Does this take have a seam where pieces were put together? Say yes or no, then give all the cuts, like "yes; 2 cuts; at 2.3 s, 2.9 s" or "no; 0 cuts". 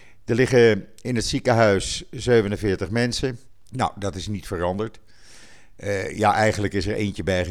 yes; 1 cut; at 3.5 s